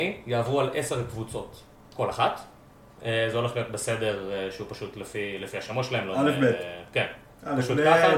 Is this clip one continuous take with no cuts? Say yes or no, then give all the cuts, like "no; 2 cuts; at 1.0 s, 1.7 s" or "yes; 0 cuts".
yes; 0 cuts